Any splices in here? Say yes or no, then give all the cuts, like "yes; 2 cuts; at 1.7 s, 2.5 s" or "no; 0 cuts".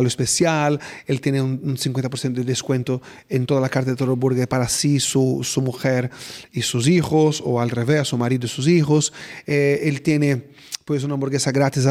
no; 0 cuts